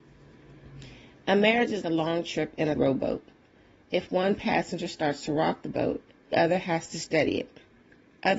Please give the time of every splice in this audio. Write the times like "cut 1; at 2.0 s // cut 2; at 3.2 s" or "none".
cut 1; at 1.8 s // cut 2; at 2.8 s // cut 3; at 6.3 s